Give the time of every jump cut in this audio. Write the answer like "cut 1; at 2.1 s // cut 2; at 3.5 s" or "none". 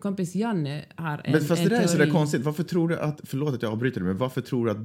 none

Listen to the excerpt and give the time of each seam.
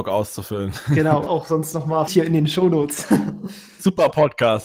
cut 1; at 1.3 s // cut 2; at 2.1 s

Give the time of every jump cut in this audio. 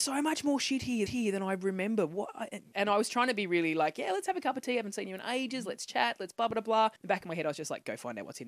cut 1; at 1.1 s // cut 2; at 2.7 s // cut 3; at 7.0 s

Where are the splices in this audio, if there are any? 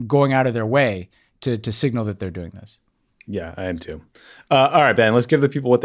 none

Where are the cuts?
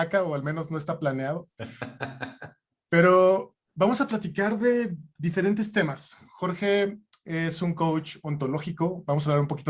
none

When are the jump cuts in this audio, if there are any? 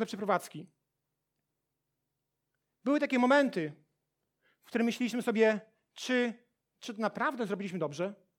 none

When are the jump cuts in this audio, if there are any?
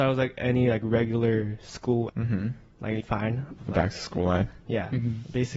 cut 1; at 2.1 s // cut 2; at 3.0 s // cut 3; at 3.6 s

